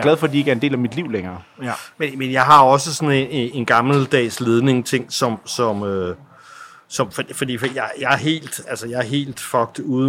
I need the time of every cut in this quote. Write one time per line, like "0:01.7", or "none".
0:03.5